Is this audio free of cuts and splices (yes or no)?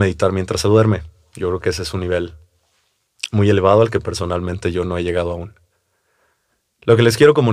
yes